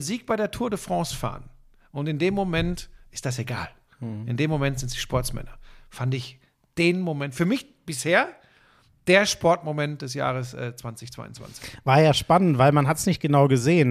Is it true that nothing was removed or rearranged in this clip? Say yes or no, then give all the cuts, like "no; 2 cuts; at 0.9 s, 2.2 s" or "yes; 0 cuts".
yes; 0 cuts